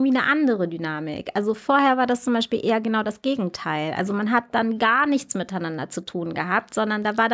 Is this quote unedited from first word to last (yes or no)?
yes